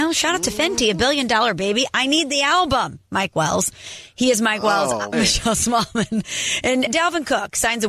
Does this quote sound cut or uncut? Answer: cut